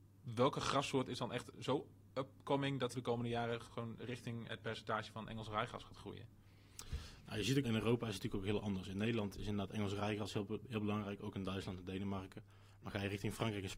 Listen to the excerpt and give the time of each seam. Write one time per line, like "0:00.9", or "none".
0:02.9
0:04.5
0:07.6

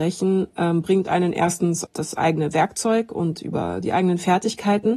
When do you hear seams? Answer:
0:01.9

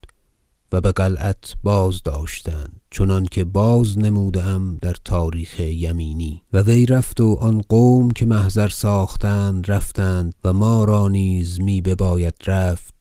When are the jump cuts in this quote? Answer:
0:02.9
0:06.5
0:10.4

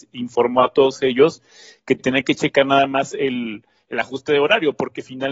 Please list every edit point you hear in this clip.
none

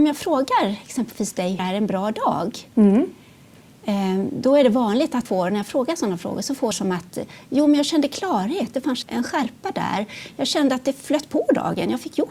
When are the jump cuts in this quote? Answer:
0:01.6
0:05.3
0:06.7
0:09.0

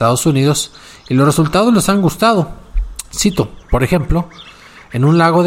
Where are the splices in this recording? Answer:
0:03.6

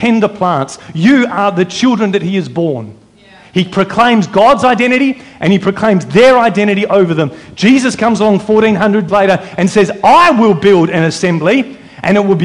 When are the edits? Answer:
0:09.1

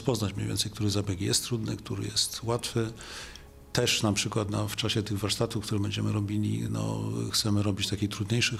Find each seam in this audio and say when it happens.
none

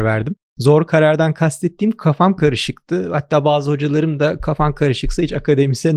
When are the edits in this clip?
none

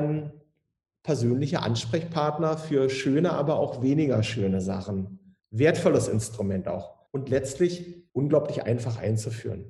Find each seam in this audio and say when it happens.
0:05.4
0:07.1
0:08.1

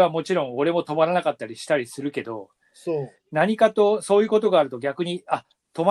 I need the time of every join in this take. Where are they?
0:03.2

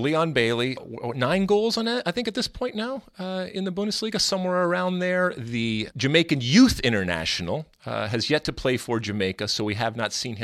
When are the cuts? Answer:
none

